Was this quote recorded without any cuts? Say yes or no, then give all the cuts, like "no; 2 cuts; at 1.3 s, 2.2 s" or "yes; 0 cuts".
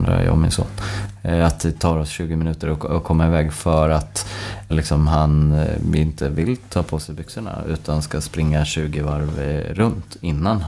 no; 1 cut; at 4.7 s